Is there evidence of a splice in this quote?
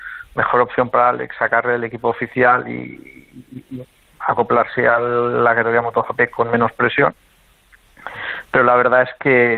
no; 0 cuts

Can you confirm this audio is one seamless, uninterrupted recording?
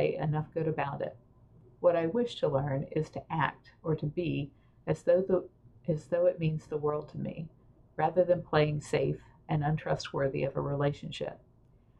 yes; 0 cuts

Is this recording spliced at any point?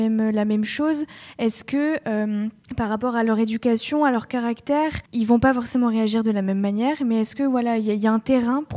yes; 2 cuts; at 2.6 s, 5.1 s

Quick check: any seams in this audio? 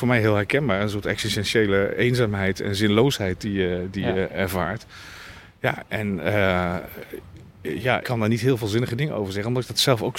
yes; 1 cut; at 8.0 s

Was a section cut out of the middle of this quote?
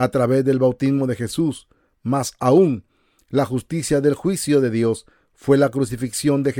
no; 0 cuts

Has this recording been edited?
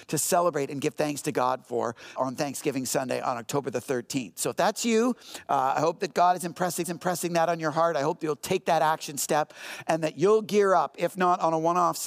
yes; 2 cuts; at 2.2 s, 6.8 s

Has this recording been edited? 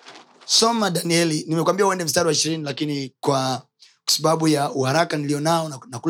no; 0 cuts

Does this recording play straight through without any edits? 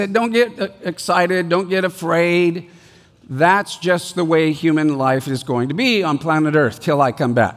yes; 0 cuts

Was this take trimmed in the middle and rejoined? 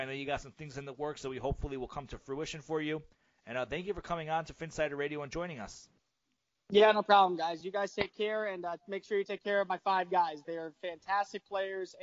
no; 0 cuts

